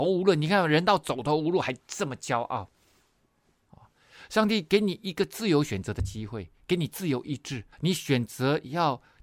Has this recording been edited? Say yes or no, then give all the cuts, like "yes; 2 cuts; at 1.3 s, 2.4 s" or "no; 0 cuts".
yes; 1 cut; at 7.7 s